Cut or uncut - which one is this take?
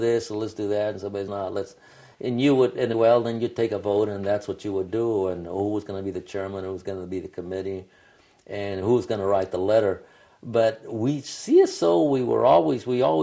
cut